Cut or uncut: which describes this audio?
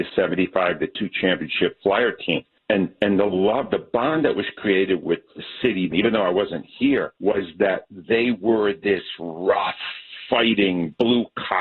cut